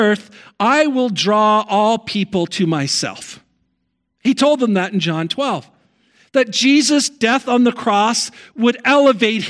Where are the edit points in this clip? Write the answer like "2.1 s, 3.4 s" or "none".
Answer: none